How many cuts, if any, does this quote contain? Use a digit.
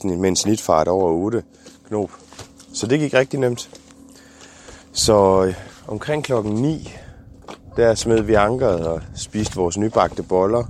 1